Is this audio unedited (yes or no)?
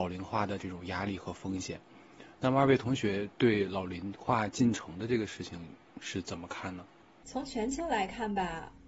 no